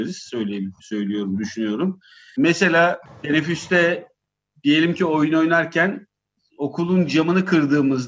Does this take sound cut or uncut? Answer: uncut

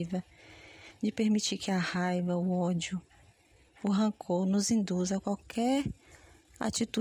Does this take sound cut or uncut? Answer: uncut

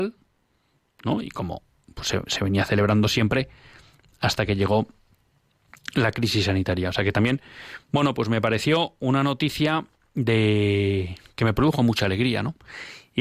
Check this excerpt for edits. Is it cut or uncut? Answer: uncut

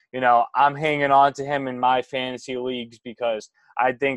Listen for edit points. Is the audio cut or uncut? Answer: uncut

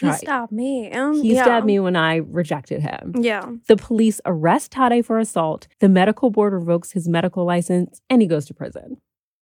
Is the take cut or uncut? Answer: cut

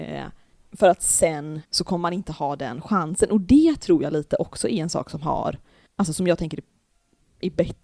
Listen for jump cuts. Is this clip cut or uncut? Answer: cut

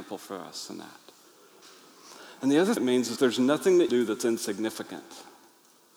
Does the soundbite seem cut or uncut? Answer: cut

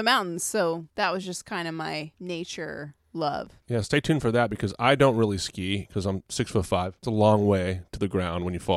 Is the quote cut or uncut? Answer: uncut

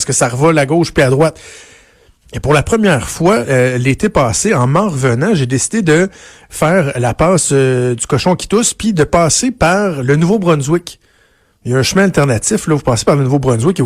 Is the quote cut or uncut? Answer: uncut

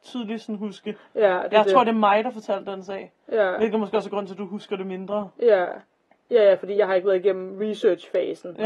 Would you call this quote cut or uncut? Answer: uncut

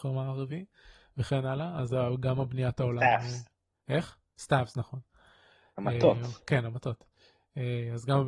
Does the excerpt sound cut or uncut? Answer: uncut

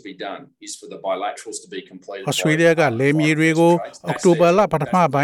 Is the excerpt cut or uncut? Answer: uncut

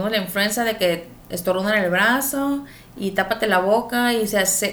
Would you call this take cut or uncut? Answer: uncut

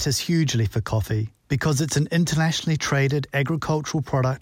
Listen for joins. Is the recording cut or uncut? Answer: uncut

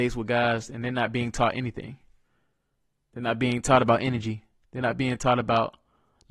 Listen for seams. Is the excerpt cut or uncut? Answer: uncut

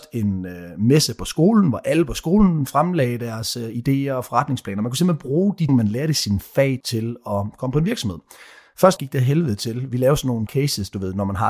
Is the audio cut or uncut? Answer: cut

